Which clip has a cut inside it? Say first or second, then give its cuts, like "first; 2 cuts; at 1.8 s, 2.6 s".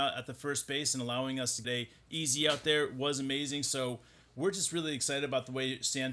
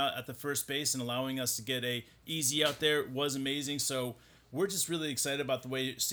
first; 1 cut; at 1.6 s